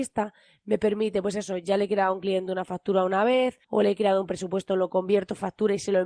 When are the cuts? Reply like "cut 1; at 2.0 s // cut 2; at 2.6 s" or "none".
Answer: cut 1; at 3.6 s